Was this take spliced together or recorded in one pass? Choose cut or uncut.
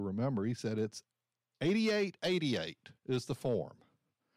cut